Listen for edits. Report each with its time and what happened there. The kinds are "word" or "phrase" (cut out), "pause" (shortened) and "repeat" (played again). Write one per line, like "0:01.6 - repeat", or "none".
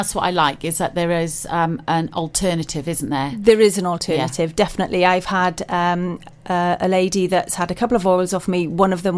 none